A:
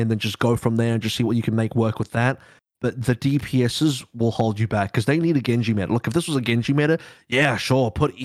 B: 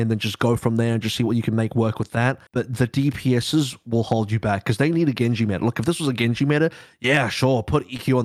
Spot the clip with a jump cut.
B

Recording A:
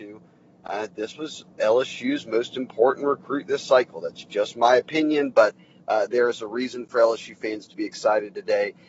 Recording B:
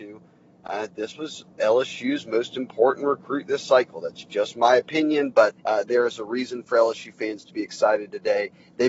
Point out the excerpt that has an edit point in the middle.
B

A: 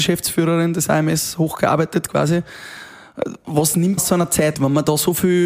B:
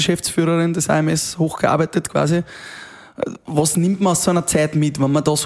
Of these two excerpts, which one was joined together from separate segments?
A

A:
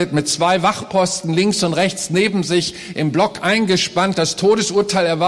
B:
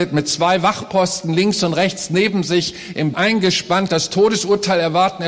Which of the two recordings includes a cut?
B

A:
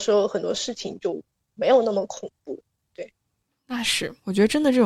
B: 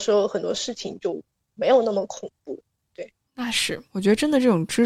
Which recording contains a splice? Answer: B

